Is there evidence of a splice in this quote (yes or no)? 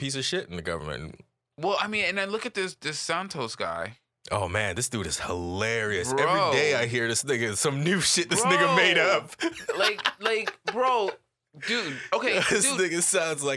no